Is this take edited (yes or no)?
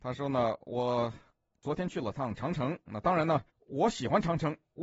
yes